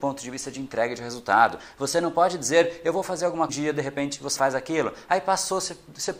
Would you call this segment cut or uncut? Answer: cut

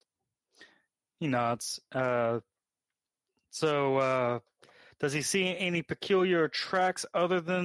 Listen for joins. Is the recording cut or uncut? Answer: uncut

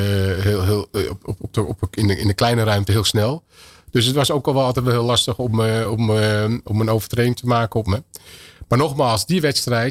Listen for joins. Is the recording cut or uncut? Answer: uncut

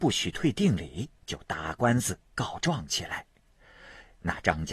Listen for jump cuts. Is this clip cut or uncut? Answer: cut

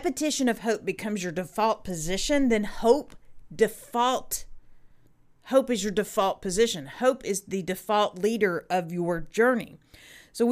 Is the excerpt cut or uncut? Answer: uncut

